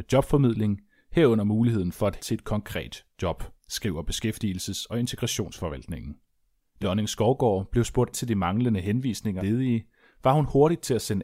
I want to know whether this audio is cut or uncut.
cut